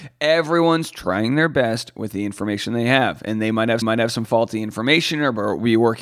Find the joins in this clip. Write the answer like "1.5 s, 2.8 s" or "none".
3.8 s